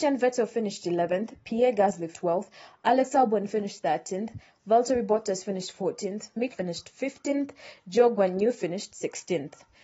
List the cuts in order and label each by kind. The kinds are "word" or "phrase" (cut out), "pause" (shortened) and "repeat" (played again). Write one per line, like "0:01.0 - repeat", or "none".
0:02.1 - word
0:06.5 - word